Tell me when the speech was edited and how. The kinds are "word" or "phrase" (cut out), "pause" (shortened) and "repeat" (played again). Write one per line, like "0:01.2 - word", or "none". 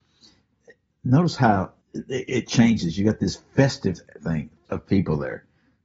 0:01.8 - pause
0:04.7 - word